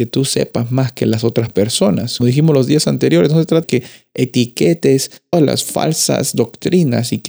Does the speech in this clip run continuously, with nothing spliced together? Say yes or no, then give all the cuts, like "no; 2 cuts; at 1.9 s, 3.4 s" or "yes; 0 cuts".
no; 3 cuts; at 2.2 s, 3.6 s, 5.3 s